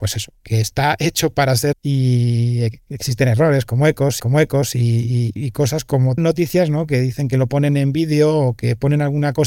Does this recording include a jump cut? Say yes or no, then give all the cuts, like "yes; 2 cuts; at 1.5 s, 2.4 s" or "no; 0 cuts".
yes; 3 cuts; at 1.7 s, 4.2 s, 6.2 s